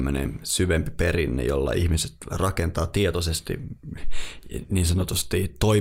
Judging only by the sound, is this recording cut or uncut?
uncut